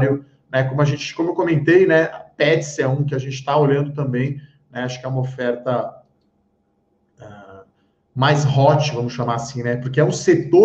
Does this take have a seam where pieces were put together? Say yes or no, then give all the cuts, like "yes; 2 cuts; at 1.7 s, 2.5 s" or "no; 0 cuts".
no; 0 cuts